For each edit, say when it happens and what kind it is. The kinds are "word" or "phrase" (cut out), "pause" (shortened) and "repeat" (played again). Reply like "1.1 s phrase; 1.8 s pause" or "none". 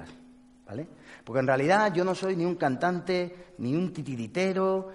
none